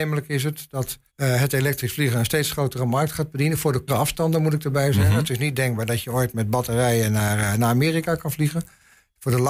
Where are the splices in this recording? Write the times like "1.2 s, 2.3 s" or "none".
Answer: 1.1 s, 3.9 s